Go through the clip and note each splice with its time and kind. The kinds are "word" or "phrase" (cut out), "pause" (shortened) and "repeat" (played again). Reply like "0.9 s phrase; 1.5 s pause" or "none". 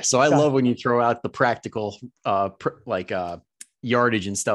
2.2 s pause